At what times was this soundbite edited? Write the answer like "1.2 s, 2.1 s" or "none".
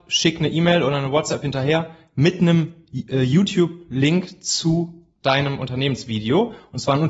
none